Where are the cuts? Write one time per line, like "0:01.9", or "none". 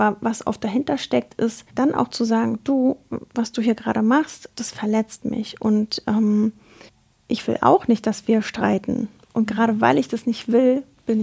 0:01.7
0:04.5
0:06.9